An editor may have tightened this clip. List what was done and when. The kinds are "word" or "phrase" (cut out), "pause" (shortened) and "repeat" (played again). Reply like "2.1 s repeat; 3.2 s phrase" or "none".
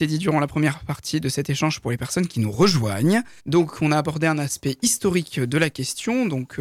3.4 s pause